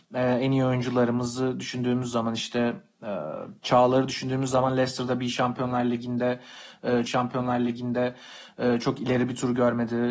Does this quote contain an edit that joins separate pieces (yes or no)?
yes